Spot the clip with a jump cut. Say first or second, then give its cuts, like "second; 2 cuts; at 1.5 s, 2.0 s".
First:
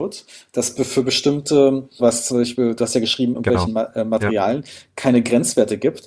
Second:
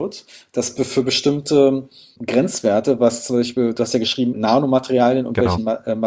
first; 2 cuts; at 2.0 s, 3.3 s